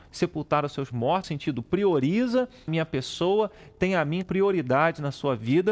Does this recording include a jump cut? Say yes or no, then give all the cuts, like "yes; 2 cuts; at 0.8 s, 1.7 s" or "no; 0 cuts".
yes; 4 cuts; at 0.9 s, 1.2 s, 2.7 s, 4.2 s